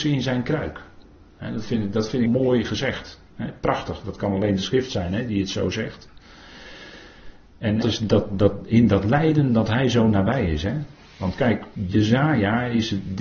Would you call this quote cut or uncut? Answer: cut